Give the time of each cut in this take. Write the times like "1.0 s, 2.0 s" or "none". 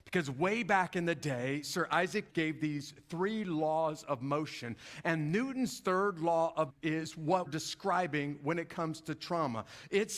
2.3 s, 6.7 s, 7.5 s